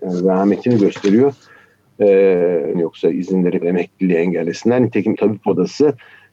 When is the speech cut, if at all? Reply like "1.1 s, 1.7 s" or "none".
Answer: 2.7 s, 3.6 s, 5.1 s